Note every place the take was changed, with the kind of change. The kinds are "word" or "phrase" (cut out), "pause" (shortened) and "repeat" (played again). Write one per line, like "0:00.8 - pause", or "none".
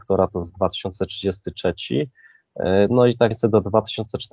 0:03.3 - word